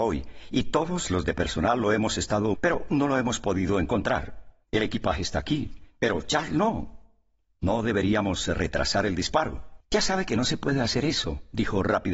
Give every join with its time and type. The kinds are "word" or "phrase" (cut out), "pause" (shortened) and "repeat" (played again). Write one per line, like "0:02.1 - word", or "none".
0:02.5 - word
0:04.6 - pause
0:09.8 - pause